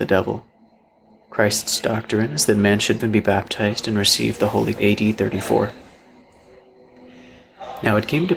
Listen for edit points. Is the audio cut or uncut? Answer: cut